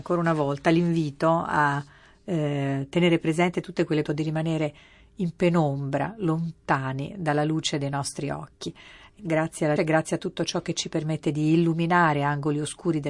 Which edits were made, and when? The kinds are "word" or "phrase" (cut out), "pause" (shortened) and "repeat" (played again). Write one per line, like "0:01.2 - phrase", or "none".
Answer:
0:04.0 - phrase
0:09.2 - word
0:09.8 - word

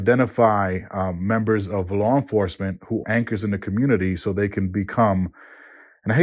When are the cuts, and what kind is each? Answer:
0:03.0 - word

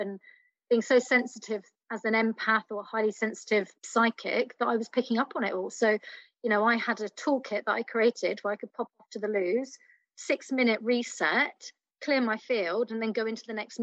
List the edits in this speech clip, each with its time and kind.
0:03.7 - pause

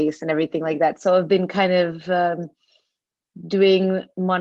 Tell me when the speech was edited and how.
none

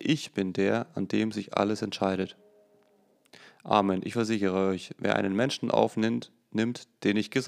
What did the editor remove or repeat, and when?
none

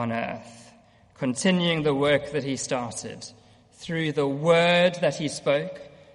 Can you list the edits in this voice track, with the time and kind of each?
none

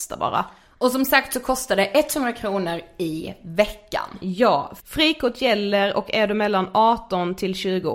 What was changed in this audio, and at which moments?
none

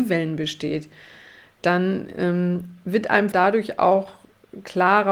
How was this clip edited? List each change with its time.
0:03.3 - word

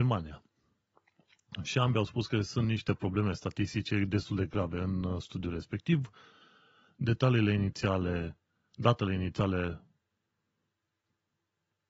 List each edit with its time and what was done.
none

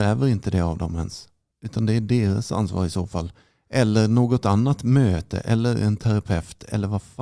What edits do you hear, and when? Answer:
none

